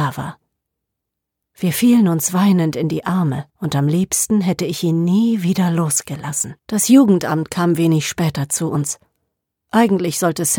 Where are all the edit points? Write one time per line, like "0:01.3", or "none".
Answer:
0:03.5
0:06.6

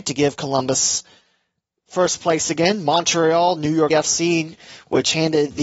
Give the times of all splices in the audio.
0:03.9

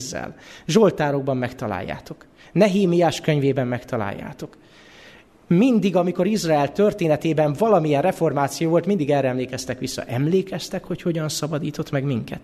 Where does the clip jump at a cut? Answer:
none

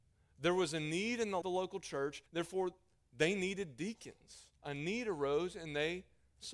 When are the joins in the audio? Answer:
0:01.4
0:02.3
0:04.6

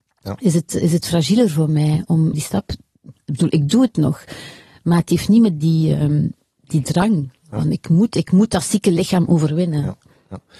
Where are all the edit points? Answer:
0:02.3

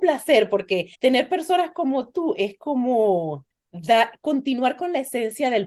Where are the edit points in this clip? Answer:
0:00.9
0:03.5

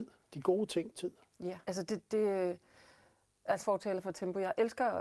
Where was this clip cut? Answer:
0:00.9
0:01.6
0:02.1
0:03.6

